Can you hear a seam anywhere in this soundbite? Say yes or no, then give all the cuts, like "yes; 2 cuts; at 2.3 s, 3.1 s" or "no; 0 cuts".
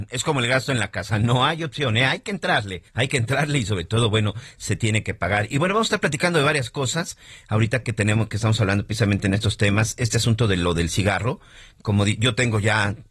yes; 1 cut; at 2.9 s